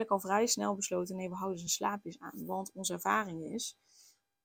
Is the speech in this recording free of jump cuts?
yes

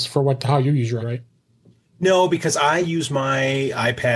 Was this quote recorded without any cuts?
no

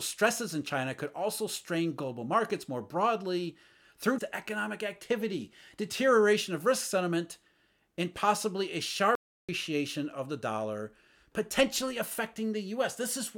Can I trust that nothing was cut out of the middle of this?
no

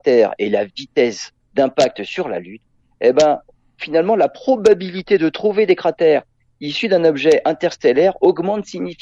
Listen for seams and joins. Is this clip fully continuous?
yes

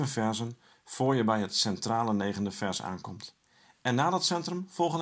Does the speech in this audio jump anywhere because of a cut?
no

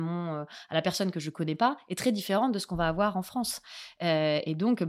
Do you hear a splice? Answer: no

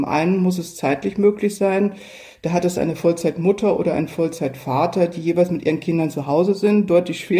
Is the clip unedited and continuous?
yes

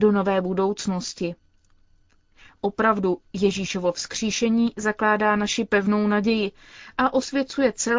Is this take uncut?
yes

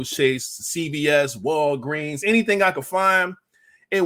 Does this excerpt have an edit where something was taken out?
no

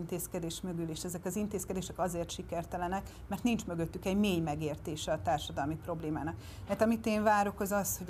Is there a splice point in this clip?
no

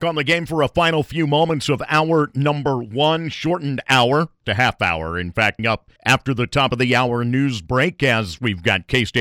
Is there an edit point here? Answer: yes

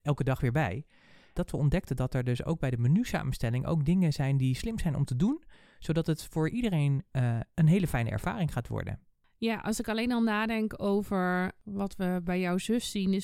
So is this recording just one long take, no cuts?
yes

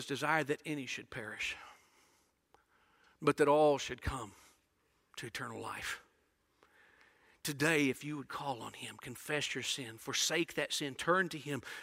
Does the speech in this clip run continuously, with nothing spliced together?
yes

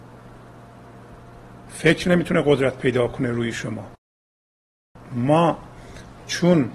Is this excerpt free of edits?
yes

